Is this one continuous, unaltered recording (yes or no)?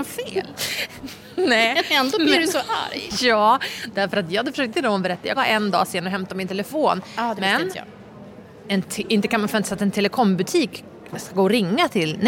no